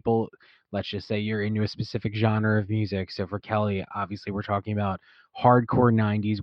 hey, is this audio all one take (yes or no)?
yes